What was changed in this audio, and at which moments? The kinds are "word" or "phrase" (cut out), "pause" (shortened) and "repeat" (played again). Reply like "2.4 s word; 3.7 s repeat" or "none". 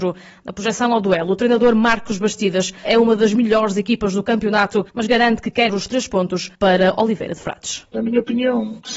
2.8 s phrase; 4.9 s pause; 5.7 s word; 6.5 s pause